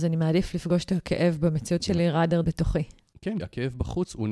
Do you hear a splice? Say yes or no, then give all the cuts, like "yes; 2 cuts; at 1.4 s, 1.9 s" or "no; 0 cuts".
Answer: yes; 3 cuts; at 1.8 s, 2.4 s, 3.4 s